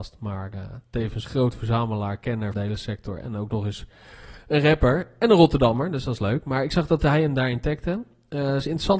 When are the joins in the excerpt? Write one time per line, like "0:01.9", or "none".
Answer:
0:01.2
0:02.5